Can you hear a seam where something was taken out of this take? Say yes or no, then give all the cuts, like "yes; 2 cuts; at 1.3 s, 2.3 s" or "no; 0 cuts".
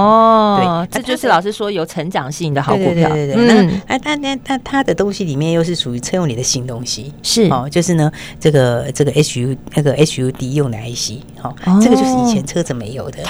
no; 0 cuts